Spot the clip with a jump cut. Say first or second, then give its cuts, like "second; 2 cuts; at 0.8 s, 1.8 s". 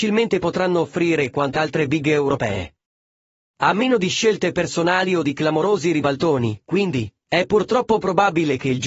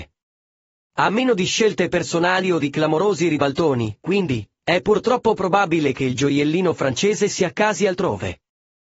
first; 1 cut; at 1.5 s